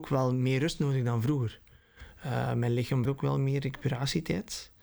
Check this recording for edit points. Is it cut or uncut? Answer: cut